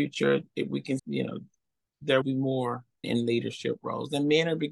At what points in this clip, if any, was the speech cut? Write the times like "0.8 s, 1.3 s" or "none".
1.0 s, 2.2 s, 3.0 s